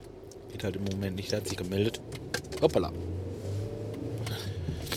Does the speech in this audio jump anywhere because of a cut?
yes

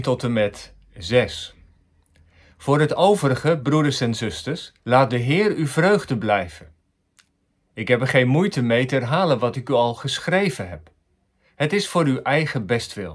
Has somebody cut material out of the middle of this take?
yes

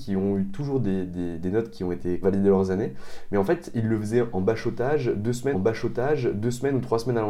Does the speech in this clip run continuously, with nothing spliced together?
no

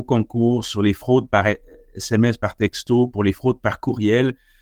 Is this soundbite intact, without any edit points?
yes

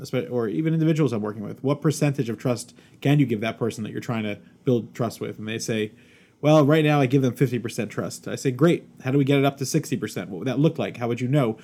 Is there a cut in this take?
no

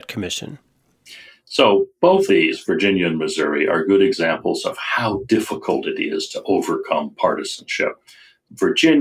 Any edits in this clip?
yes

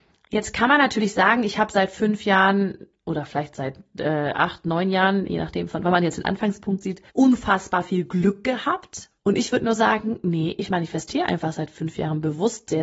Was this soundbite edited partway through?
yes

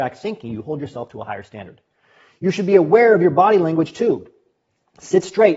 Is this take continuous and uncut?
yes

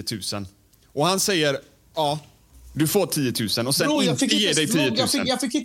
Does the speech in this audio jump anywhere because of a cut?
no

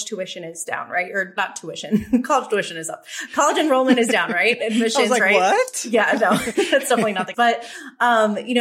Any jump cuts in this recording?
yes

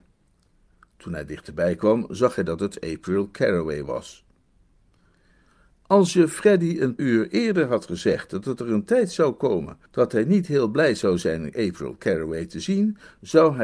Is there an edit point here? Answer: yes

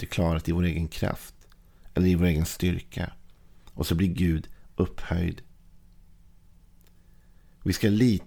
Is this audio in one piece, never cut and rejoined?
yes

